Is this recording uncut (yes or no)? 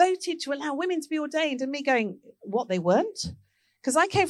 yes